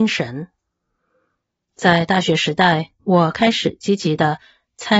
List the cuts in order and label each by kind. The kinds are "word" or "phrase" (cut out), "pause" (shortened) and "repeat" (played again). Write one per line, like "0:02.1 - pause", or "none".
0:03.0 - pause

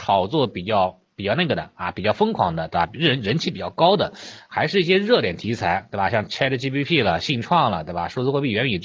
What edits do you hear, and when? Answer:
none

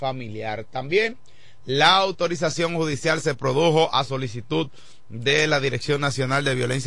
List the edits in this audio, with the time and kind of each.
none

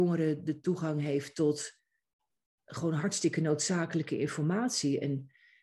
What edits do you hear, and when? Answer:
none

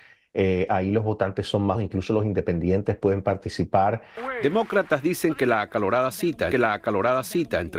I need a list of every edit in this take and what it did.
0:01.7 - word
0:06.5 - repeat

